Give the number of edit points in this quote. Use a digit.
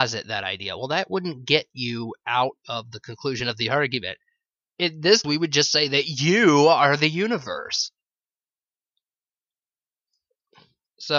1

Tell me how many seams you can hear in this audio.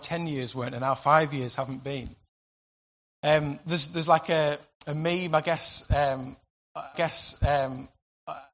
1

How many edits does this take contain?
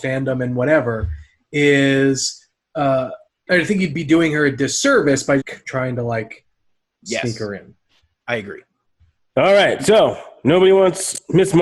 2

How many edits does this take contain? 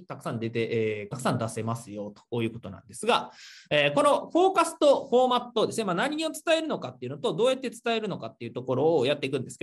1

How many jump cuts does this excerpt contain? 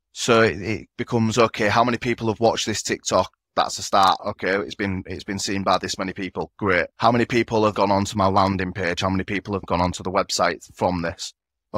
3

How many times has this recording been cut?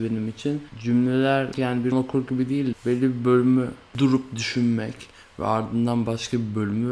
4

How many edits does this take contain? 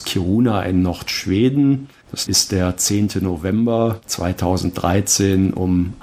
1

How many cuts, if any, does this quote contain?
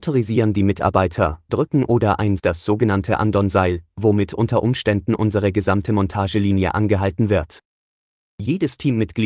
2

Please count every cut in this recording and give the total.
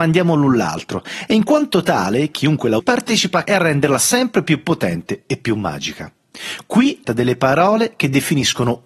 3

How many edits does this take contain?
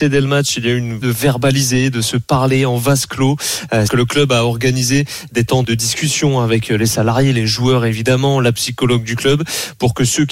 3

